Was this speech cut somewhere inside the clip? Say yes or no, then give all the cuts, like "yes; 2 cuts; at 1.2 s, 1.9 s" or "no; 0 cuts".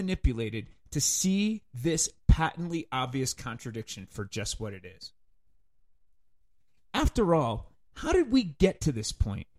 no; 0 cuts